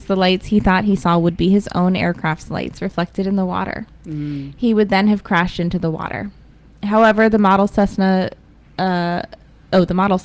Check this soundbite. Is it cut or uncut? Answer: uncut